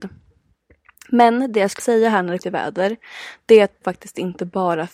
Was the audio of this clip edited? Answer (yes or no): yes